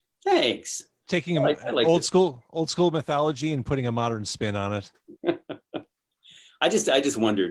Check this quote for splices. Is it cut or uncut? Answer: uncut